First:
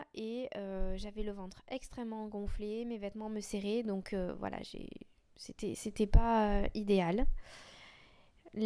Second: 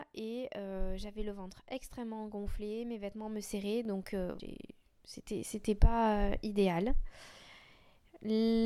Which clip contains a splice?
second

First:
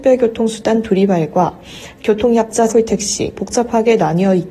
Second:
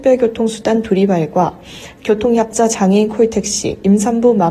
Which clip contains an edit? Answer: first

